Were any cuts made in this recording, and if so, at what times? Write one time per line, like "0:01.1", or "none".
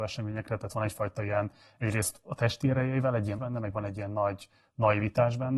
0:03.4